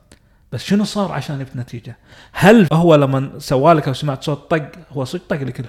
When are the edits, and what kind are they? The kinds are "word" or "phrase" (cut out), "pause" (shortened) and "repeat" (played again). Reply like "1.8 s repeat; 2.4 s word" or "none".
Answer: 2.7 s word; 3.8 s word